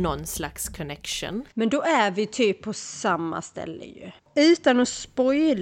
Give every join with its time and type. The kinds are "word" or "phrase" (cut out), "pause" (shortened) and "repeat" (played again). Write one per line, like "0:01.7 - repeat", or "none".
0:01.5 - pause
0:04.2 - pause